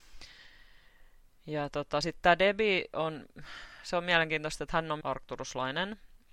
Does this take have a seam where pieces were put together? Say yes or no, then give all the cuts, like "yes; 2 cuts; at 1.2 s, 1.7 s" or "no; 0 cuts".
yes; 1 cut; at 5.0 s